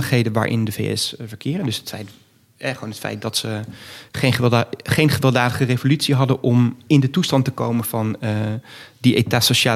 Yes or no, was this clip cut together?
no